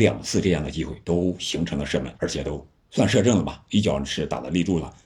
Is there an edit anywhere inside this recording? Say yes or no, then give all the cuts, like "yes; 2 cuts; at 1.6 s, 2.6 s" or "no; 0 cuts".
yes; 3 cuts; at 1.0 s, 2.1 s, 2.8 s